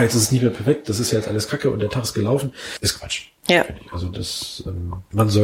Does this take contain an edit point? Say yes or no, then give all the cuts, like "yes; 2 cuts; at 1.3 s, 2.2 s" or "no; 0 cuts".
no; 0 cuts